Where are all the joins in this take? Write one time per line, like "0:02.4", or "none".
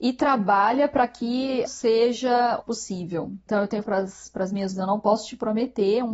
0:01.7
0:02.6
0:03.8
0:04.7